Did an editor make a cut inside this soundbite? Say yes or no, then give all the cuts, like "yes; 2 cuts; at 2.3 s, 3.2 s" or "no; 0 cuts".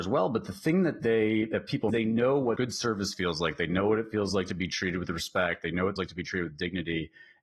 yes; 2 cuts; at 1.9 s, 6.0 s